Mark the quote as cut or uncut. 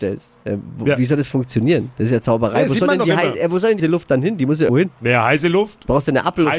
cut